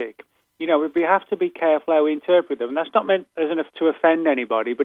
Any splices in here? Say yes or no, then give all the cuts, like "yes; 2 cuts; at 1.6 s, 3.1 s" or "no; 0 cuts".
yes; 1 cut; at 3.7 s